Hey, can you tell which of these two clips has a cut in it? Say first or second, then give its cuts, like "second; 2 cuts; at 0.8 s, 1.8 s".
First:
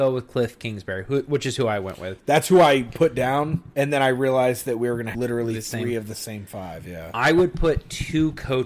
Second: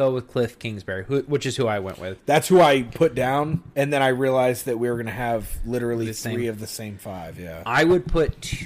first; 1 cut; at 5.1 s